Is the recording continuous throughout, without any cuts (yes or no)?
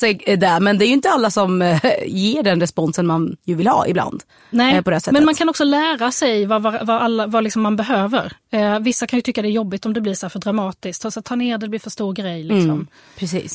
yes